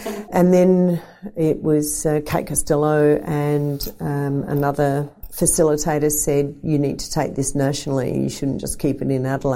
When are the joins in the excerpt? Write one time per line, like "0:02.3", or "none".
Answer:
none